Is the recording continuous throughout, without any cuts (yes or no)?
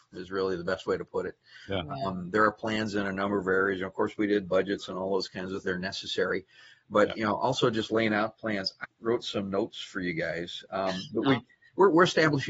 no